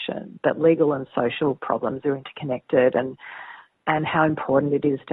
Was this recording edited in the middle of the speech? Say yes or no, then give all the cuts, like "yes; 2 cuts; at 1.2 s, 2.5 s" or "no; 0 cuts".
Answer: no; 0 cuts